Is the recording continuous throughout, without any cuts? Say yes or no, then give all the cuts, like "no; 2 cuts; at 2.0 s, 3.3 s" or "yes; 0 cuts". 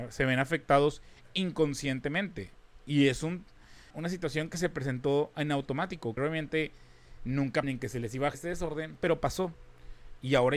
no; 4 cuts; at 3.9 s, 6.2 s, 7.6 s, 8.3 s